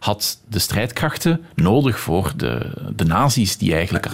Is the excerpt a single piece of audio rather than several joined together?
yes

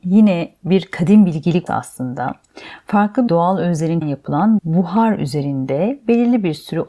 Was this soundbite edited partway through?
yes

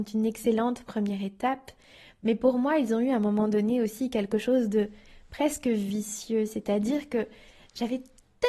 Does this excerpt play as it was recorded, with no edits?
yes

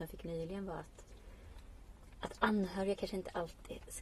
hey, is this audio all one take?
yes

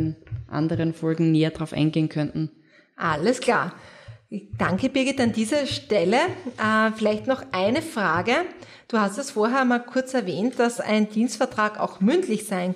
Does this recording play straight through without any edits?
yes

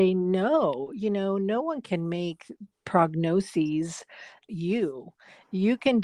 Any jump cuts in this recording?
yes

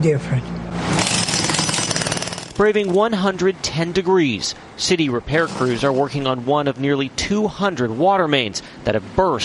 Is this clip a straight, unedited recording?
yes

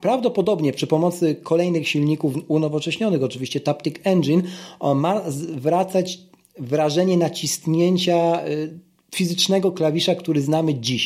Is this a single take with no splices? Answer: yes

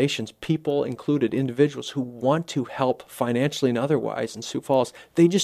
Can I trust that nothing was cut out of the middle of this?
yes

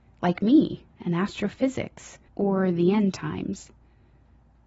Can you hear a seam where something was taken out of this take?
yes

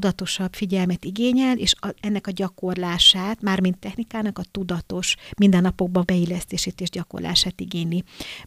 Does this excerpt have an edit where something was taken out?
yes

